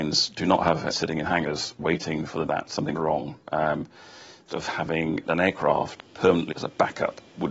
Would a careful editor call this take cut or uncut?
cut